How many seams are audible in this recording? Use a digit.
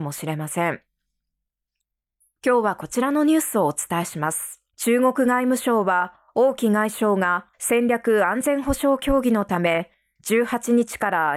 2